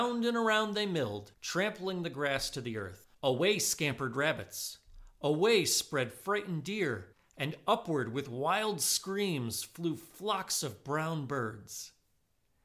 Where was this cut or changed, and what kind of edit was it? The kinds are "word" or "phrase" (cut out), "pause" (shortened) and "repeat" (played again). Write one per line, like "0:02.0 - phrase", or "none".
0:01.3 - pause
0:03.1 - pause
0:07.1 - pause